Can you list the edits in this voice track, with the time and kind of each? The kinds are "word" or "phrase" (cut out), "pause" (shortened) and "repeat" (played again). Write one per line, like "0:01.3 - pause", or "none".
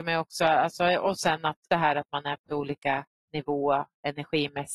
0:01.7 - word
0:02.5 - word
0:03.1 - pause